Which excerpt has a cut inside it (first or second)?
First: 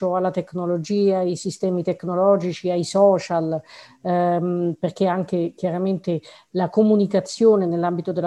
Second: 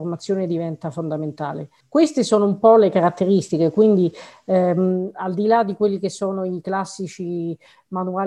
second